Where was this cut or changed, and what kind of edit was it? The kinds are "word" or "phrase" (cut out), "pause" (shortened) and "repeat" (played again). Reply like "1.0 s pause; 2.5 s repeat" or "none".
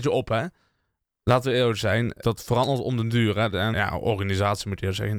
2.2 s phrase; 3.7 s word